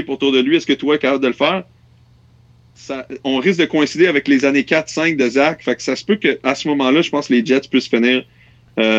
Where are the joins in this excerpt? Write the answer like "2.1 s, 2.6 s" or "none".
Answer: none